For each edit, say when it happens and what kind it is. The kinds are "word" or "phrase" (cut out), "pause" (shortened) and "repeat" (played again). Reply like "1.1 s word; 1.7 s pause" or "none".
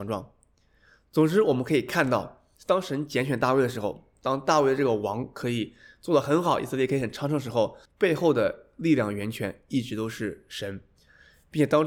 2.5 s pause; 7.9 s pause